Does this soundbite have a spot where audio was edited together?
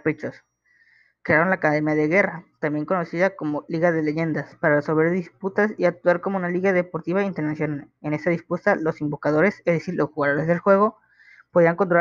no; 0 cuts

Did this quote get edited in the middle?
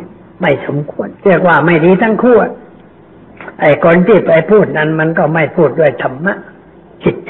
yes; 2 cuts; at 1.2 s, 3.5 s

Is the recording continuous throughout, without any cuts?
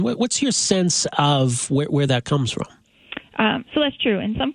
yes; 0 cuts

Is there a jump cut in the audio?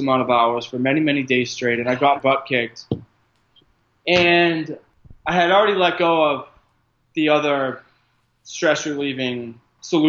yes; 1 cut; at 2.2 s

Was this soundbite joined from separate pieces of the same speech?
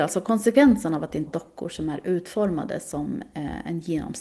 yes; 1 cut; at 1.3 s

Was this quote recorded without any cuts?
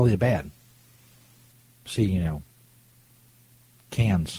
yes; 0 cuts

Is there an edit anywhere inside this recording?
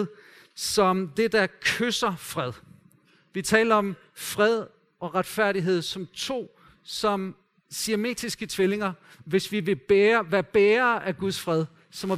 no; 0 cuts

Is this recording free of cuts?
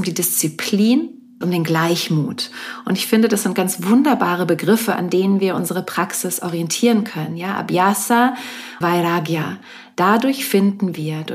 no; 2 cuts; at 1.4 s, 8.8 s

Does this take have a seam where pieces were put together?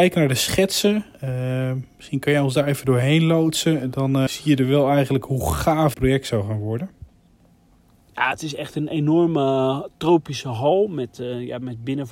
yes; 3 cuts; at 1.1 s, 4.3 s, 5.9 s

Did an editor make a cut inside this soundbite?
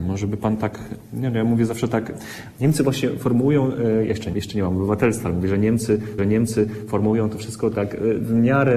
yes; 2 cuts; at 4.3 s, 6.2 s

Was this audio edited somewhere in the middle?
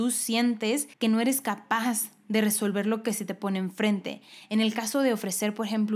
yes; 1 cut; at 0.9 s

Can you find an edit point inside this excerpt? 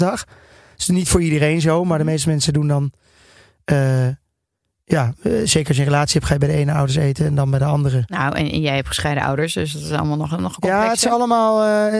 no; 0 cuts

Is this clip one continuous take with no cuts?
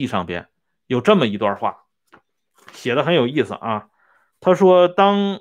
yes; 0 cuts

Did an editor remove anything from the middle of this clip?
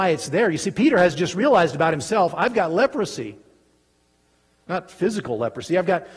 no; 0 cuts

